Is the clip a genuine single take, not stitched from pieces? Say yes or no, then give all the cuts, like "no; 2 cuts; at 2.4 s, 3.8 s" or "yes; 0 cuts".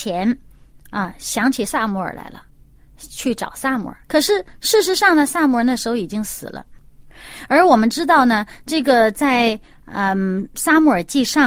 no; 1 cut; at 4.0 s